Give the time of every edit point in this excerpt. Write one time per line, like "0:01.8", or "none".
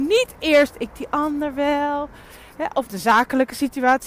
0:00.9
0:02.9

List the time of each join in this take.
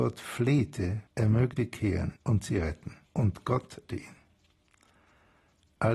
0:01.1
0:01.5
0:02.2
0:03.1
0:03.9

